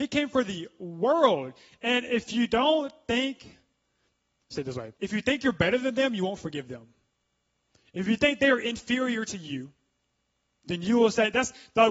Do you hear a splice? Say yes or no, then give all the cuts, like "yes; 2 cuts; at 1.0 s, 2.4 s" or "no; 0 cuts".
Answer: yes; 1 cut; at 5.0 s